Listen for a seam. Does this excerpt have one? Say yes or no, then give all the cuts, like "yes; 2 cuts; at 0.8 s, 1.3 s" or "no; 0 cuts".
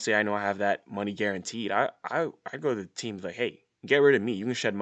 no; 0 cuts